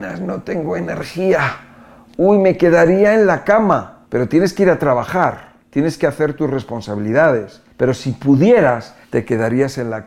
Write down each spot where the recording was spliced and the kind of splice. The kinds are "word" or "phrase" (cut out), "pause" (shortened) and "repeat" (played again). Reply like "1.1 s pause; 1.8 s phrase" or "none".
4.0 s pause; 5.6 s pause; 7.7 s pause; 9.0 s pause